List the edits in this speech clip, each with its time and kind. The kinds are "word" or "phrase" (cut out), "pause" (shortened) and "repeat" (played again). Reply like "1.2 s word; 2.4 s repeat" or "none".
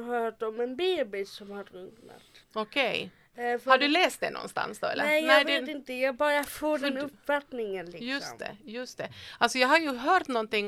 2.4 s pause